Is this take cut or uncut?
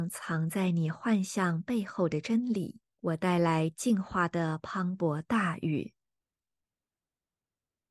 cut